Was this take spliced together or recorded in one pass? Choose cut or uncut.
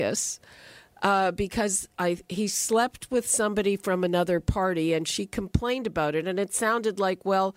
uncut